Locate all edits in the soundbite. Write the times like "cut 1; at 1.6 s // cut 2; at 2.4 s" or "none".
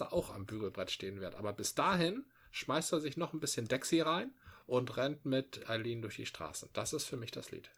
none